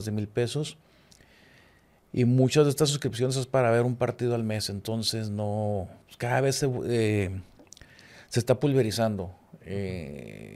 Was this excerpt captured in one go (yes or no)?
no